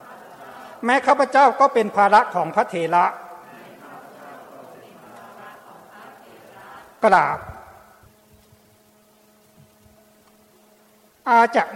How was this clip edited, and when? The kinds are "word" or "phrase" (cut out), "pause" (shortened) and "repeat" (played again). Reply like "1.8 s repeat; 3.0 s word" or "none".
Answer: none